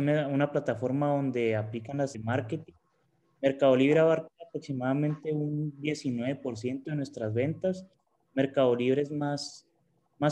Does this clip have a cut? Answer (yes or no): yes